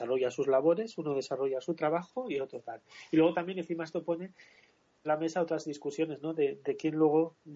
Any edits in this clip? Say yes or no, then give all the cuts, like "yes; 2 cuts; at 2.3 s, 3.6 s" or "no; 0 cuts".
yes; 1 cut; at 5.0 s